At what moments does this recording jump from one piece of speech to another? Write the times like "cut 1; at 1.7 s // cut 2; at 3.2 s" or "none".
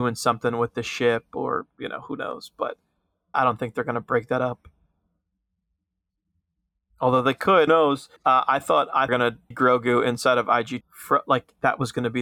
cut 1; at 3.3 s // cut 2; at 7.7 s // cut 3; at 8.2 s // cut 4; at 9.1 s // cut 5; at 9.5 s // cut 6; at 10.8 s